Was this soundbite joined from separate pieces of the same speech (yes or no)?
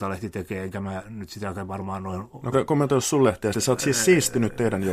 yes